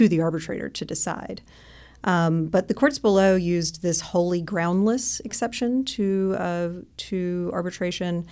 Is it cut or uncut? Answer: uncut